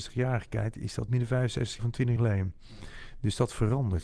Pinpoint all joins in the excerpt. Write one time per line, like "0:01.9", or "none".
0:01.1
0:01.8
0:02.2